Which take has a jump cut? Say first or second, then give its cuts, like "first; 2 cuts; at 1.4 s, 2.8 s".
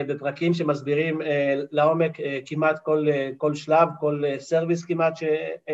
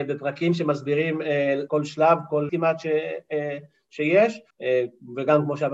second; 3 cuts; at 1.7 s, 2.5 s, 4.5 s